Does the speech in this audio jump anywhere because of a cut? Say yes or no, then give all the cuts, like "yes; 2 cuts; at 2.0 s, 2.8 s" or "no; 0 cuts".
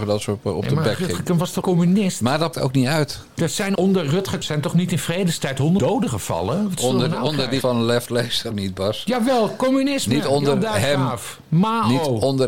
yes; 8 cuts; at 1.2 s, 1.6 s, 2.5 s, 3.8 s, 4.4 s, 5.8 s, 7.6 s, 8.5 s